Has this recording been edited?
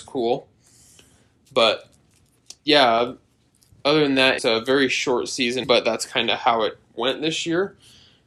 yes; 3 cuts; at 2.6 s, 4.4 s, 5.6 s

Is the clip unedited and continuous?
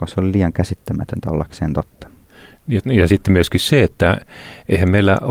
yes; 0 cuts

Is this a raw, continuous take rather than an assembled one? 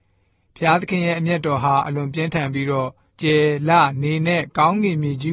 no; 1 cut; at 3.1 s

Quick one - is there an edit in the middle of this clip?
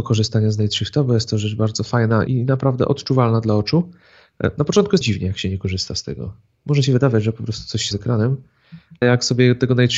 yes; 4 cuts; at 2.3 s, 5.0 s, 7.9 s, 9.0 s

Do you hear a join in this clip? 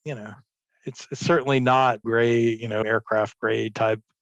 yes; 2 cuts; at 2.0 s, 2.8 s

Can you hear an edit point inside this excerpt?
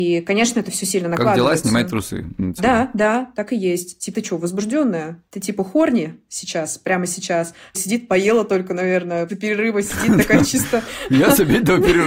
yes; 5 cuts; at 2.6 s, 4.1 s, 5.3 s, 7.7 s, 9.3 s

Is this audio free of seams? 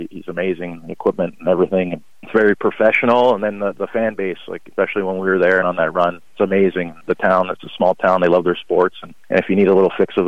no; 1 cut; at 5.6 s

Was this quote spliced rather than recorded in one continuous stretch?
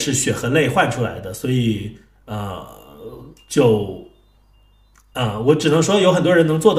no; 0 cuts

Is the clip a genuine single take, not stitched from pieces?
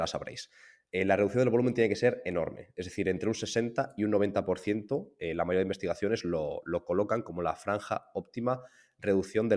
yes; 0 cuts

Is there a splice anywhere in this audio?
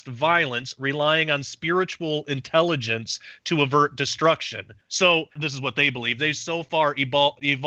yes; 1 cut; at 5.3 s

